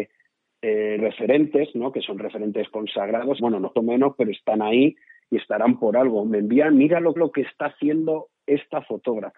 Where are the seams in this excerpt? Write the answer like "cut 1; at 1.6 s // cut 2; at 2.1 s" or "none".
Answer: cut 1; at 1.0 s // cut 2; at 3.4 s // cut 3; at 3.8 s // cut 4; at 7.2 s